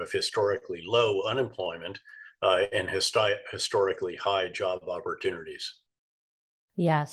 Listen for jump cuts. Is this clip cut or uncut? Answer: uncut